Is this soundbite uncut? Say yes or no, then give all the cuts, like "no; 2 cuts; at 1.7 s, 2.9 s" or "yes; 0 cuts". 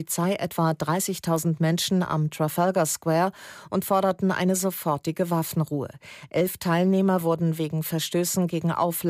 yes; 0 cuts